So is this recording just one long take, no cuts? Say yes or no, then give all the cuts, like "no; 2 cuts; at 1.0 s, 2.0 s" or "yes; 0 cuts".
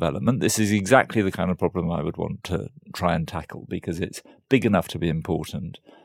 yes; 0 cuts